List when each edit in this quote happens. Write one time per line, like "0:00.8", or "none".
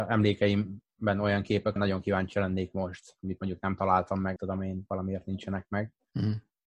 0:01.8
0:04.4